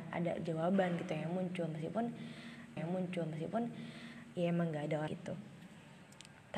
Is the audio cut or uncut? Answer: cut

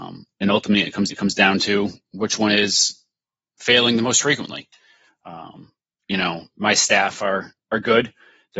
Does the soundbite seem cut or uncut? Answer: cut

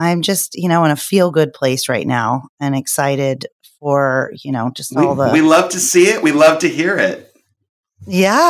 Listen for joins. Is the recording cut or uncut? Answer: uncut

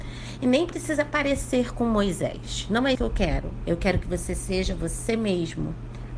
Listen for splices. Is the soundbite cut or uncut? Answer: cut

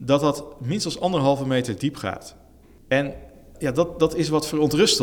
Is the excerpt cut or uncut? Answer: uncut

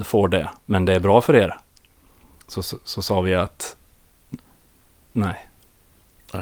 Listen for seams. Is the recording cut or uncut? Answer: uncut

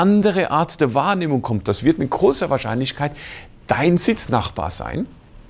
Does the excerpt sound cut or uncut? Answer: uncut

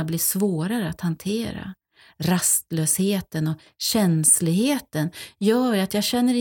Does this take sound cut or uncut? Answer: uncut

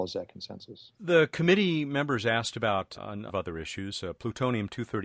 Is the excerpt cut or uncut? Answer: cut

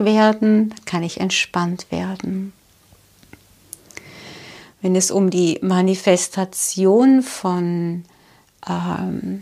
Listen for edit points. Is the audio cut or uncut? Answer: uncut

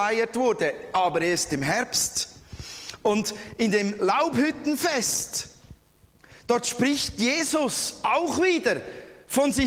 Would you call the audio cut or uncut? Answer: uncut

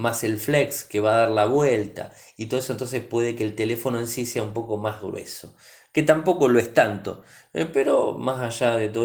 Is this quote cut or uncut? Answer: uncut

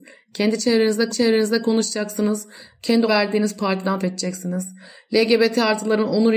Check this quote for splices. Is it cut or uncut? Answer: cut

